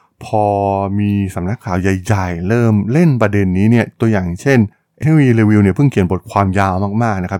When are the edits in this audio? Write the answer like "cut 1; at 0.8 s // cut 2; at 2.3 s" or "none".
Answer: cut 1; at 5.0 s